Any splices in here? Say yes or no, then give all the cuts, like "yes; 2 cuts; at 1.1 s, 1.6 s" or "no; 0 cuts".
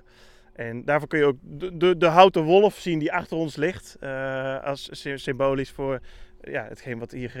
no; 0 cuts